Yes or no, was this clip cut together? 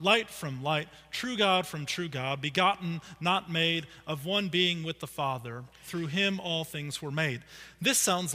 no